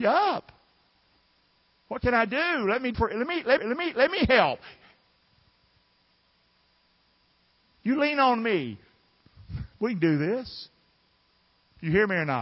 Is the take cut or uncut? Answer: cut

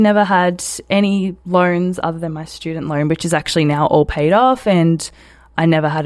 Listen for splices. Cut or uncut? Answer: uncut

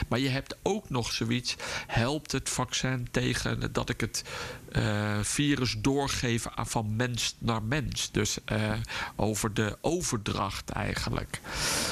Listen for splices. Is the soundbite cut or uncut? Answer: uncut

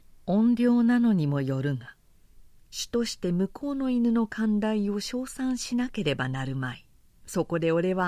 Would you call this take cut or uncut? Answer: cut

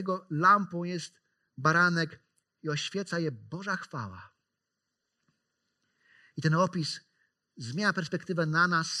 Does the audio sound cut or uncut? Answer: uncut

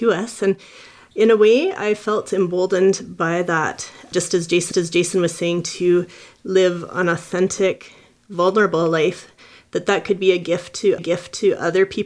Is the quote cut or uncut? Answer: cut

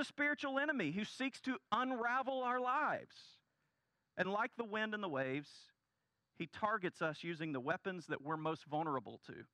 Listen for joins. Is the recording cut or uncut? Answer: uncut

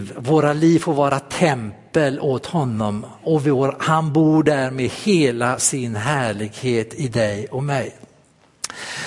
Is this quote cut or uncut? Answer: uncut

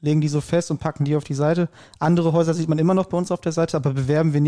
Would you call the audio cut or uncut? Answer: uncut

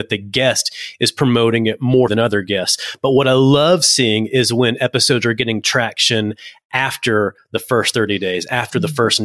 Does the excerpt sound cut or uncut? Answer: cut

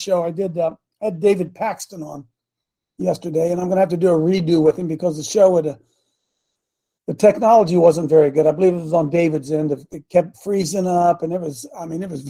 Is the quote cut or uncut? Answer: uncut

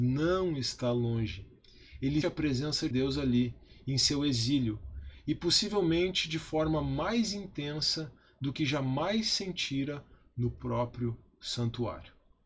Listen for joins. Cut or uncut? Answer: cut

